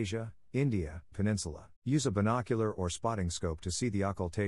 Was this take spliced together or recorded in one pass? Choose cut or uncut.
cut